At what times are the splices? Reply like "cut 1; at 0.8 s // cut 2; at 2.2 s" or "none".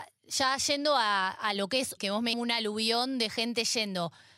cut 1; at 2.0 s // cut 2; at 2.3 s